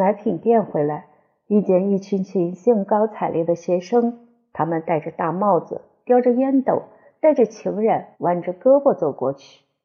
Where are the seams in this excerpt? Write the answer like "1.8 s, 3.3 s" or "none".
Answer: 8.1 s